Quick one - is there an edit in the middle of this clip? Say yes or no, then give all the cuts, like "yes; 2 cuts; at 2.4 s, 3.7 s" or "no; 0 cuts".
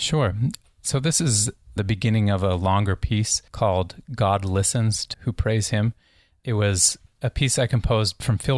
yes; 3 cuts; at 1.8 s, 3.5 s, 5.1 s